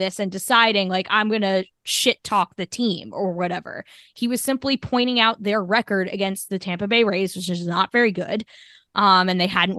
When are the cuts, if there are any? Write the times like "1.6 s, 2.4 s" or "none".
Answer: none